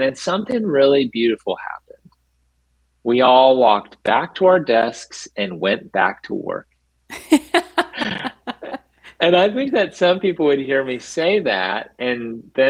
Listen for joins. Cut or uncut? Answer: uncut